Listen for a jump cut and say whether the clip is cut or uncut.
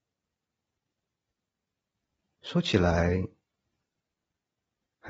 uncut